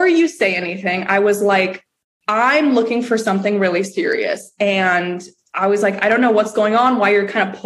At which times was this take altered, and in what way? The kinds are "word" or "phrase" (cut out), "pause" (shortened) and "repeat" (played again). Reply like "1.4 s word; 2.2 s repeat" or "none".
none